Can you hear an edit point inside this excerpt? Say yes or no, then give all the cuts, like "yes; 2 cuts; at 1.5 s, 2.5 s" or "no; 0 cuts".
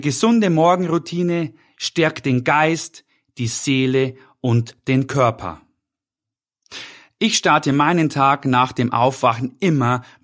no; 0 cuts